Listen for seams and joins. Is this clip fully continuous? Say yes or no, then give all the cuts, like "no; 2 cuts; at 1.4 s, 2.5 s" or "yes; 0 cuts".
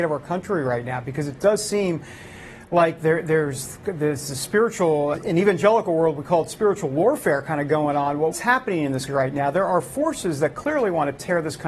no; 4 cuts; at 3.0 s, 5.1 s, 8.3 s, 9.1 s